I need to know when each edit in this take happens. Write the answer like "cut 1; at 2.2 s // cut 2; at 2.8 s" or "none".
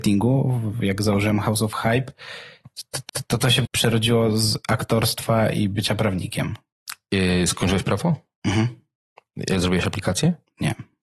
cut 1; at 3.1 s // cut 2; at 3.6 s